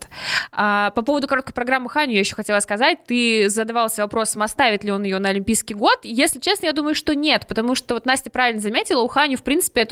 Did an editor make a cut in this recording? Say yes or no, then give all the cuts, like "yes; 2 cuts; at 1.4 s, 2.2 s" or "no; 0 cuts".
no; 0 cuts